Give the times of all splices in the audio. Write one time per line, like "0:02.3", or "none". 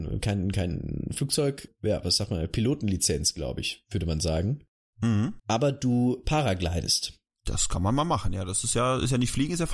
none